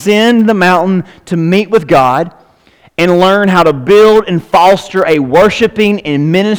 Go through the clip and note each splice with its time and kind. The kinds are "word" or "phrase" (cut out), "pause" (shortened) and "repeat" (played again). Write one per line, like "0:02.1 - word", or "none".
none